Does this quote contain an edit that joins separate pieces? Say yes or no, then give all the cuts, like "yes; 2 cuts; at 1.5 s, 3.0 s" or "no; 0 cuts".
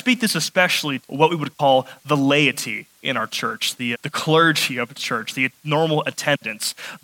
yes; 2 cuts; at 1.0 s, 3.9 s